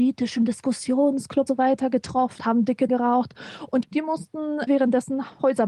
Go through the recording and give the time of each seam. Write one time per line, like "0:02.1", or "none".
0:01.5
0:02.4
0:02.9
0:03.8
0:04.7